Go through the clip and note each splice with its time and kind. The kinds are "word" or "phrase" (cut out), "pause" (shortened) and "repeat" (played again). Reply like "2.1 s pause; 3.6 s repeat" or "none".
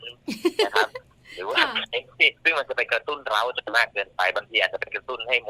none